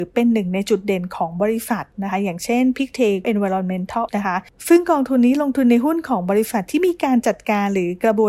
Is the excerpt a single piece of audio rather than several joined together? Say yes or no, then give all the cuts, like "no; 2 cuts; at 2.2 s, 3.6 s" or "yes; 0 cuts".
no; 2 cuts; at 3.2 s, 4.1 s